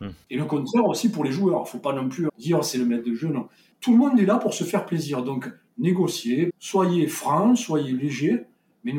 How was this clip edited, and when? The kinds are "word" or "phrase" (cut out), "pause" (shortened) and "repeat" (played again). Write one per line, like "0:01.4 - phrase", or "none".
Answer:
0:02.3 - word
0:06.5 - word